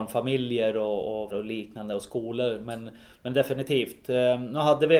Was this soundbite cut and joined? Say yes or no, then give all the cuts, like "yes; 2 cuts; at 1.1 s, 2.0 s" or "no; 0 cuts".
yes; 1 cut; at 1.3 s